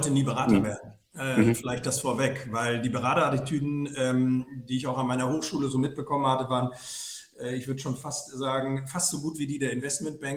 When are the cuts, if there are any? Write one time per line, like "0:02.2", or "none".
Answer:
none

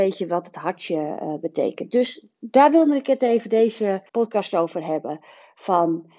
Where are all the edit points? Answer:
0:02.3
0:04.1

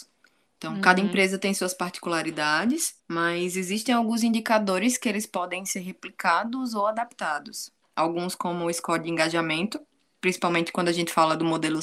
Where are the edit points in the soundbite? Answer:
0:03.0

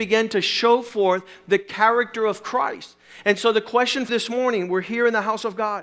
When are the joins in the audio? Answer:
0:04.1

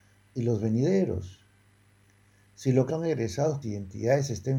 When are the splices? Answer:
0:02.9
0:03.6

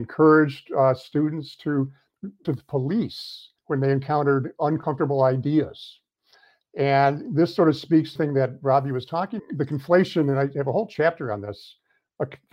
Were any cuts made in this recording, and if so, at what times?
0:02.4
0:03.6
0:08.2
0:09.4

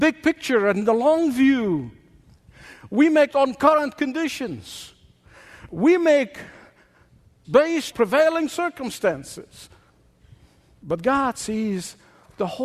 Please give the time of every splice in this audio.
0:03.3
0:07.4
0:07.9

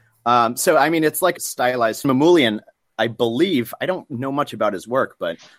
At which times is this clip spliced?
0:01.4
0:02.0

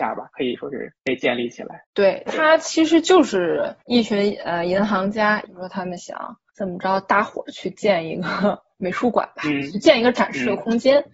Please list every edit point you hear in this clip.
0:01.8
0:05.5

